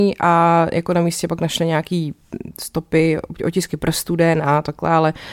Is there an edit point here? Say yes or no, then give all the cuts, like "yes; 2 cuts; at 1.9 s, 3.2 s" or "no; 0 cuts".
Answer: no; 0 cuts